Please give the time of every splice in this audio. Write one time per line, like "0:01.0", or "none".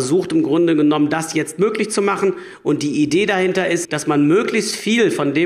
0:03.8